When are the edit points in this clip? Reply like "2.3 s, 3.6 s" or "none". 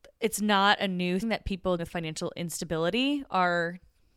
1.2 s, 1.8 s